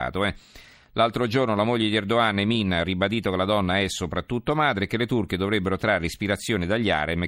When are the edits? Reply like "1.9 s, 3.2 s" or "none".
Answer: none